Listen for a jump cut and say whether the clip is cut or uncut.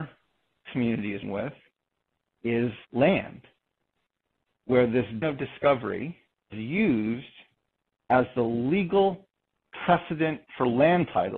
cut